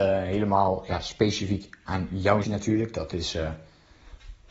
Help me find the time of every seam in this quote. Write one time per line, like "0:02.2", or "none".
0:02.4